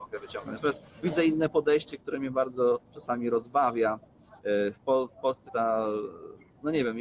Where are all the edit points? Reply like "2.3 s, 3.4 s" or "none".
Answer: 1.0 s, 4.4 s, 5.5 s

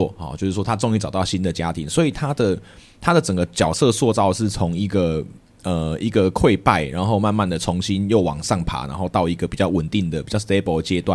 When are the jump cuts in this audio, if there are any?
none

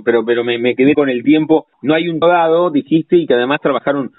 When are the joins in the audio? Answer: 0.9 s, 1.7 s, 2.2 s

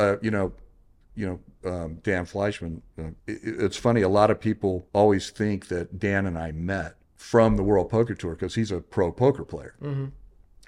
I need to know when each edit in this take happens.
3.2 s, 4.9 s, 7.0 s

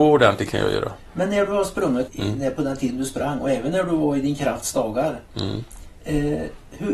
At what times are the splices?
2.1 s

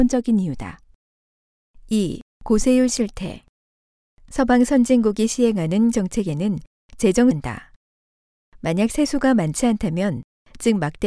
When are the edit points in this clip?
5.9 s, 7.3 s

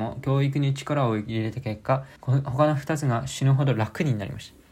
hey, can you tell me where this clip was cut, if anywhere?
2.2 s

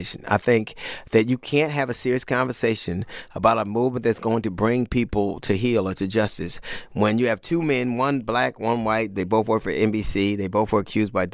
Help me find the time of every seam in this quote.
none

